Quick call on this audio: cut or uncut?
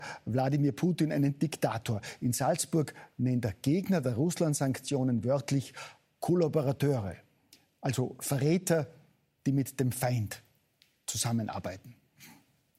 uncut